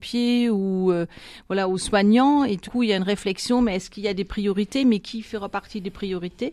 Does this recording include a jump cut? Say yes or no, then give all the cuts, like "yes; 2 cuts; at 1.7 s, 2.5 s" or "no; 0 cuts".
yes; 1 cut; at 2.6 s